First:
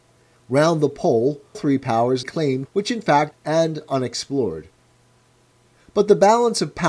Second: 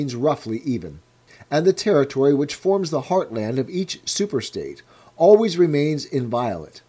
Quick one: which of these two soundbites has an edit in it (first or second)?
first